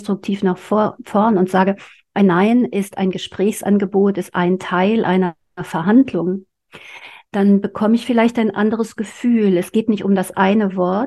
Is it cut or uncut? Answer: uncut